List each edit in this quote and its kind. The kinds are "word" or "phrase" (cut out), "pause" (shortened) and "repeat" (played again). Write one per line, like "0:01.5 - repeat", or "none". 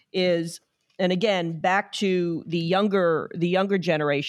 none